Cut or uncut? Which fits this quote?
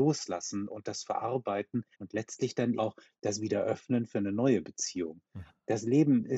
cut